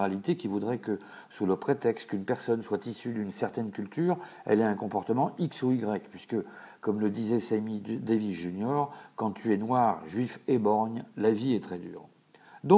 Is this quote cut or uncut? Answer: uncut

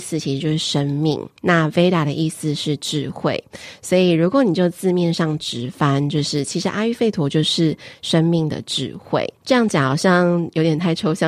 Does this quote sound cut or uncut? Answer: cut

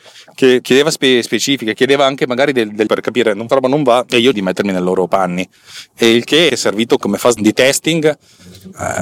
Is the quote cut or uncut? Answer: cut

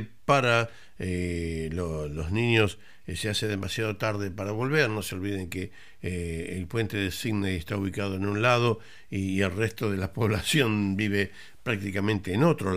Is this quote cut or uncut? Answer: uncut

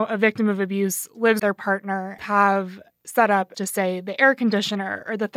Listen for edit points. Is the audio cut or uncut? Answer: cut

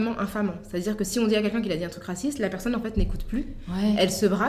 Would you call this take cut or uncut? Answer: uncut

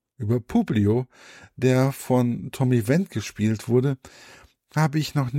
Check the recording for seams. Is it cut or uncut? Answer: uncut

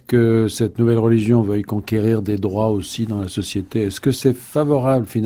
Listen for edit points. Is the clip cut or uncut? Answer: uncut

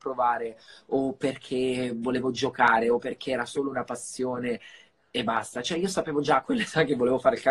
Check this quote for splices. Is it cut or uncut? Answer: uncut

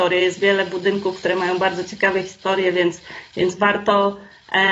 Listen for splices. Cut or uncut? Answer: uncut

